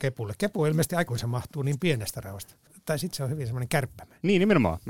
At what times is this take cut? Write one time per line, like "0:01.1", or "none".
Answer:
0:01.1